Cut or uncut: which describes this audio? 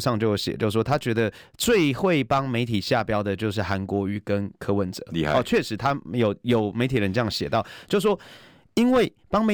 uncut